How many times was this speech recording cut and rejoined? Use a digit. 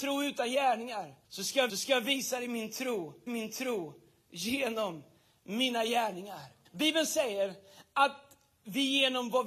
4